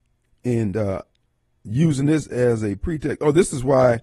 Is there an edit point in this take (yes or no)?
no